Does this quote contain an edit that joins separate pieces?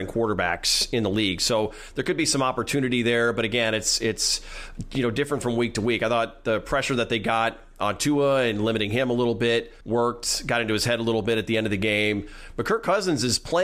yes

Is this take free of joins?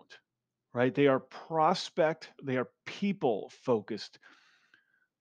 no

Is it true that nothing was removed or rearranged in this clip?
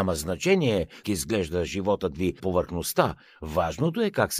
no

